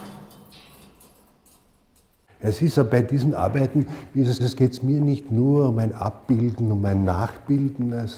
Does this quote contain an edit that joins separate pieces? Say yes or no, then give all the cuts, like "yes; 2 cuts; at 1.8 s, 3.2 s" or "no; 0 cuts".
yes; 2 cuts; at 2.8 s, 4.4 s